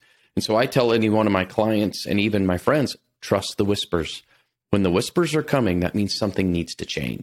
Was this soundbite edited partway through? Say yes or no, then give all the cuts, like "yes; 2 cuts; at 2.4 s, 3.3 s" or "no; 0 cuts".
no; 0 cuts